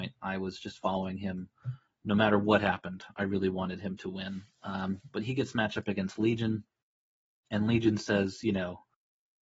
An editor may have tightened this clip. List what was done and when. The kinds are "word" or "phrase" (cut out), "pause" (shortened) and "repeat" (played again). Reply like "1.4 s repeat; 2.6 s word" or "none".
none